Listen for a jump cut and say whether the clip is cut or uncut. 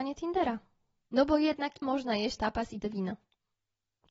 cut